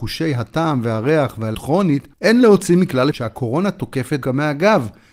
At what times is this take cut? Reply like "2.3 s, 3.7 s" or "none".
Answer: 1.5 s, 2.1 s, 3.1 s, 4.2 s